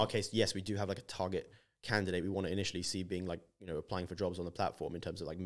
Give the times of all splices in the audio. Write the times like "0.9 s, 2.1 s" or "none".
none